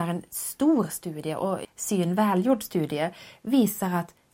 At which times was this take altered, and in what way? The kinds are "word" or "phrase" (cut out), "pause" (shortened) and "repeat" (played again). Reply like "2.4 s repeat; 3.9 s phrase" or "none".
1.6 s word